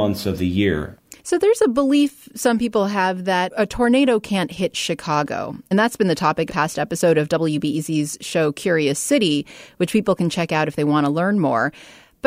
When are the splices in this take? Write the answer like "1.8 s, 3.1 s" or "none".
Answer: 1.2 s, 5.7 s, 6.5 s